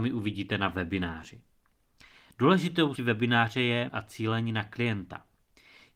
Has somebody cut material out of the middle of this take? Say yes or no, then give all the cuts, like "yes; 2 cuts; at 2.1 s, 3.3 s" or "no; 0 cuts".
yes; 2 cuts; at 3.0 s, 3.9 s